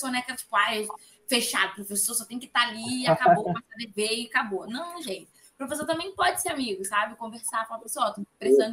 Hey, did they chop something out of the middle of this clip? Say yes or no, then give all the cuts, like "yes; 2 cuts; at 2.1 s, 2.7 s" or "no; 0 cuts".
no; 0 cuts